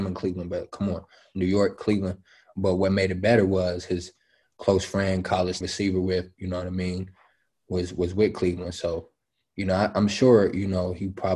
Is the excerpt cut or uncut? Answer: cut